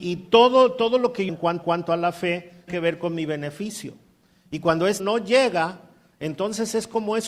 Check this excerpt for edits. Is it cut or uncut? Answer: cut